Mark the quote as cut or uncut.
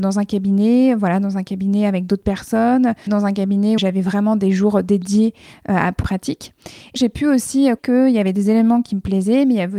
cut